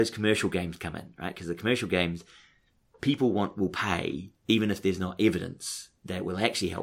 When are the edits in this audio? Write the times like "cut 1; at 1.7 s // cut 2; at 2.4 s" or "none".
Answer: cut 1; at 4.4 s